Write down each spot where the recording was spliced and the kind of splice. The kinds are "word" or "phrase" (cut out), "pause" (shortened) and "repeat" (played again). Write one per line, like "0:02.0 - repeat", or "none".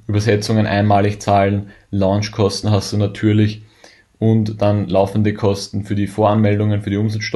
none